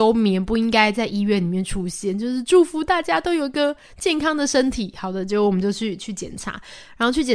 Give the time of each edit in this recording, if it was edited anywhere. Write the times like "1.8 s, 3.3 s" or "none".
none